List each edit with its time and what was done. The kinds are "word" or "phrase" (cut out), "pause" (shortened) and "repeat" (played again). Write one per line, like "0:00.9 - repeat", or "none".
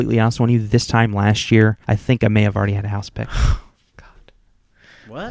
0:01.8 - pause

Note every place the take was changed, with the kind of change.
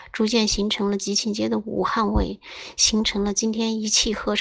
none

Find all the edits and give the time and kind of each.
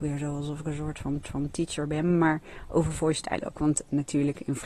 0:01.2 - repeat

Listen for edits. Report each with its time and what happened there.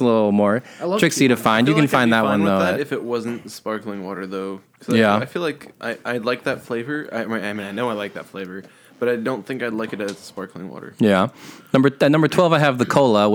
none

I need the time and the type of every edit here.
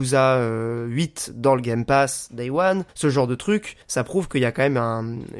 0:02.9 - pause
0:03.8 - pause

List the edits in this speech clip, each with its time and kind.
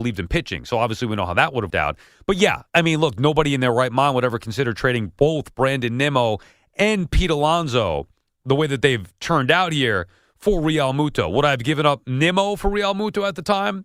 0:01.7 - word

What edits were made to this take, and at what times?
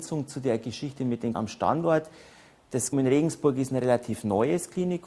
0:01.3 - word
0:02.9 - word

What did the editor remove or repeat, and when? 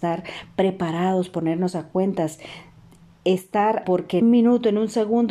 0:03.8 - word
0:04.2 - word

